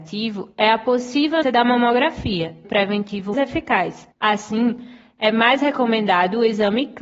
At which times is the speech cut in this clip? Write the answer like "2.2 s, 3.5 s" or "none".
1.4 s, 2.6 s, 3.3 s, 4.1 s